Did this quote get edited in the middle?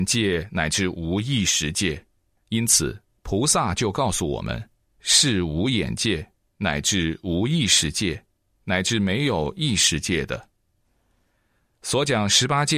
no; 0 cuts

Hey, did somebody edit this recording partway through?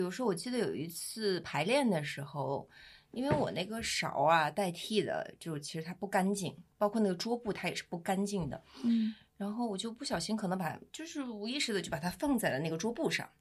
yes; 1 cut; at 10.9 s

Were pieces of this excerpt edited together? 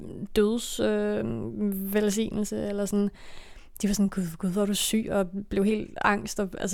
no; 0 cuts

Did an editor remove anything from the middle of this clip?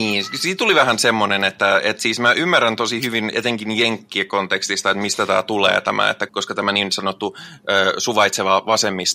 yes; 1 cut; at 6.3 s

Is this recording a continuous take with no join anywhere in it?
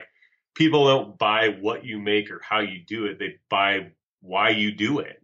yes; 0 cuts

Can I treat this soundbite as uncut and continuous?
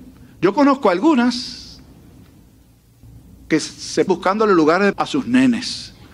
no; 2 cuts; at 4.1 s, 4.9 s

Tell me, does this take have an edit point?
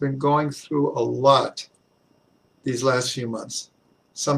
no; 0 cuts

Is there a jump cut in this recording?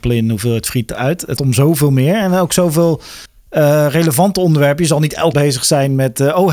yes; 2 cuts; at 1.4 s, 5.3 s

